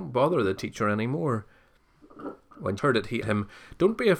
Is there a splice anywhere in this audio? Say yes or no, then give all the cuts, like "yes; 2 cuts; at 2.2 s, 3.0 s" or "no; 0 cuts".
yes; 2 cuts; at 2.8 s, 3.2 s